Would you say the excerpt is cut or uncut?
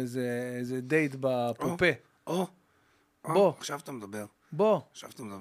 uncut